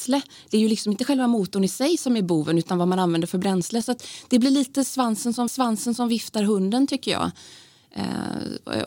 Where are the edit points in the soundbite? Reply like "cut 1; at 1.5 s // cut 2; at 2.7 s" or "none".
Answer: cut 1; at 5.5 s